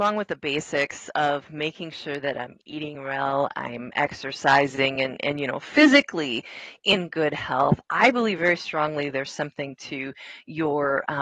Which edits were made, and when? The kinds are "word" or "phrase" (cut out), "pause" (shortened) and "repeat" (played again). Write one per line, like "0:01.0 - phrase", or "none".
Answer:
none